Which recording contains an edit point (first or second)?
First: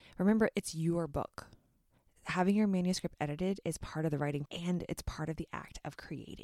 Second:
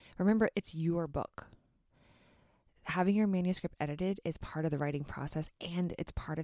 first